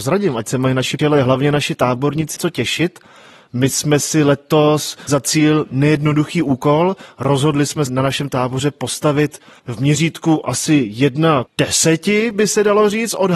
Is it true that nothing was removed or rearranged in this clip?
no; 6 cuts; at 1.0 s, 2.4 s, 5.1 s, 7.9 s, 9.6 s, 11.5 s

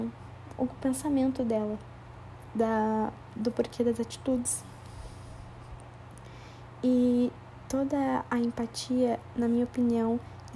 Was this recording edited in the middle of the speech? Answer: no; 0 cuts

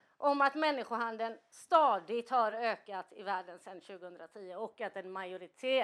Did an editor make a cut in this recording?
no; 0 cuts

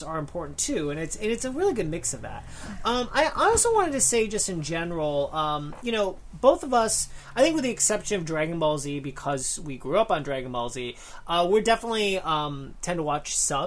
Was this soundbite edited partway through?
no; 0 cuts

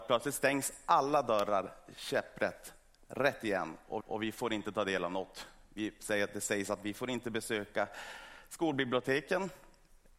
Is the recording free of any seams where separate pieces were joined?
no; 1 cut; at 4.0 s

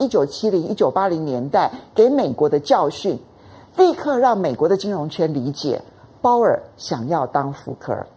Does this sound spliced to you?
no; 0 cuts

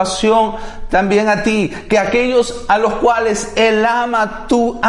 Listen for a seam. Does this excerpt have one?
no; 0 cuts

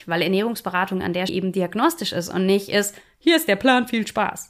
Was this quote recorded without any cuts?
no; 1 cut; at 1.3 s

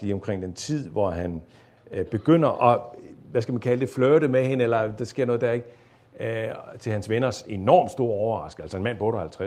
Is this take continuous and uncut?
yes; 0 cuts

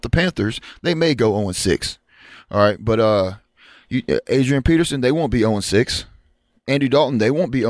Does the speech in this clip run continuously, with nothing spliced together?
yes; 0 cuts

